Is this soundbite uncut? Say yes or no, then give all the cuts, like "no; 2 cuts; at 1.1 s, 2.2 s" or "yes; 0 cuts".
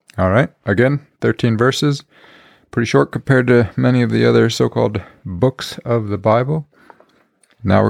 yes; 0 cuts